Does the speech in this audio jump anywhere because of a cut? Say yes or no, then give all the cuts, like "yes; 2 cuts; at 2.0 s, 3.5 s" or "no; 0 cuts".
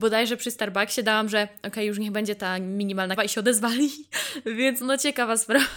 yes; 2 cuts; at 3.2 s, 4.8 s